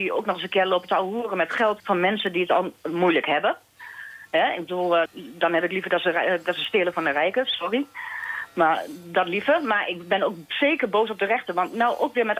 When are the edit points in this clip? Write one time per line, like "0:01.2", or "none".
0:01.8
0:05.1

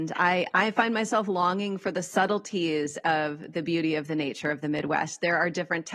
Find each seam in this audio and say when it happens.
none

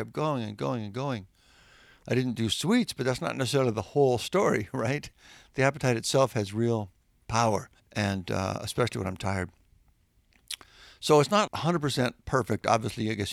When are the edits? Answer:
0:07.8
0:11.5

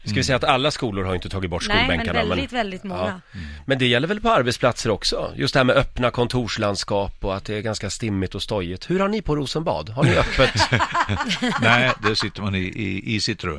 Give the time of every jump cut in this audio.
none

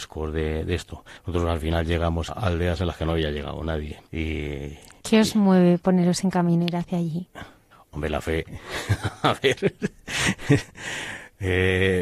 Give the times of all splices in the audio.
0:01.2
0:02.3
0:04.1
0:05.8
0:07.7

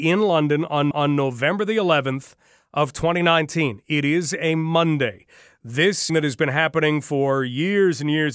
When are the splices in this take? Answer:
0:00.9
0:06.1

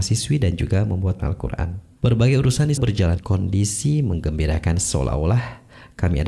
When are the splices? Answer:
0:01.2
0:02.0
0:02.8
0:03.2

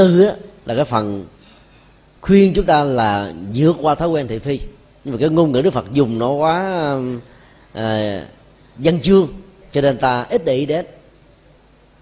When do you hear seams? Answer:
none

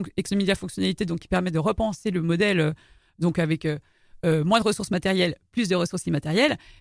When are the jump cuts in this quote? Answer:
none

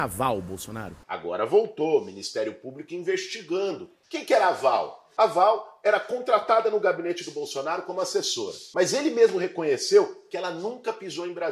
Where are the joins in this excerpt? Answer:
0:01.0

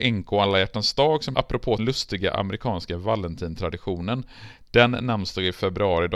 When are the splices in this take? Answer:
0:01.3
0:01.8

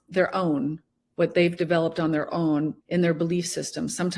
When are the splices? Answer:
0:02.8

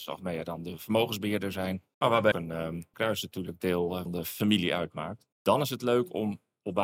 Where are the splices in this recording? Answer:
0:01.9
0:02.3
0:02.9
0:04.1
0:05.3

